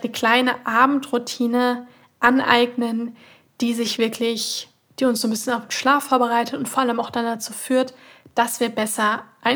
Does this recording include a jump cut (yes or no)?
no